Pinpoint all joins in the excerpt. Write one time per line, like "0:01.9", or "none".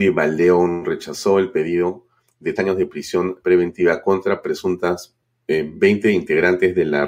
0:02.6
0:03.4